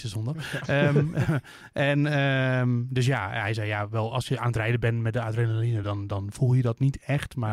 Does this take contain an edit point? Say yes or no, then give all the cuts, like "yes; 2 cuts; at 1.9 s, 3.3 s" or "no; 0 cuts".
no; 0 cuts